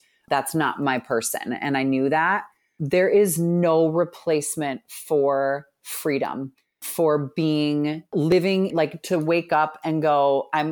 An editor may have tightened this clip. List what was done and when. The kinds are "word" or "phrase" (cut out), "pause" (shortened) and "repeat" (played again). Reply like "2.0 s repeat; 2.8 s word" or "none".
none